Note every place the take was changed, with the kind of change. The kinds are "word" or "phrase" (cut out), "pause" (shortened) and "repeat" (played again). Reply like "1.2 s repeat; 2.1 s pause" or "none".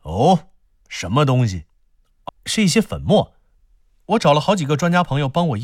2.3 s word